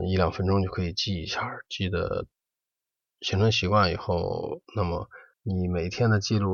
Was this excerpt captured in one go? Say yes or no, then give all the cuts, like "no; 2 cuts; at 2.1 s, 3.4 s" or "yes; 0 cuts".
no; 1 cut; at 5.3 s